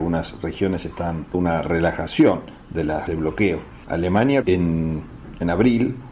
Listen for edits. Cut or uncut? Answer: cut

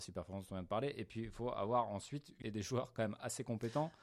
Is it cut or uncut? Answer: cut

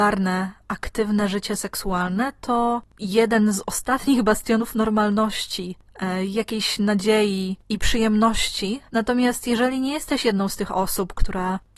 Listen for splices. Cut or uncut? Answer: uncut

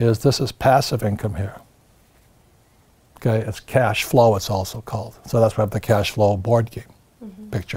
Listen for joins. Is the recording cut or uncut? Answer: uncut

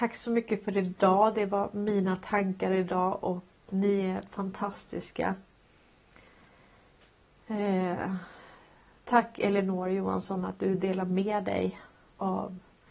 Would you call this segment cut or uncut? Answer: cut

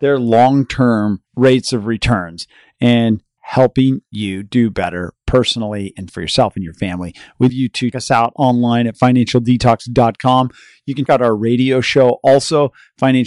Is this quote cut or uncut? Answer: cut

